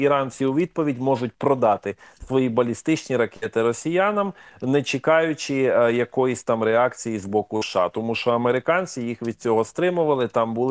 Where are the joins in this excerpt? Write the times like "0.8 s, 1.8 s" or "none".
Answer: none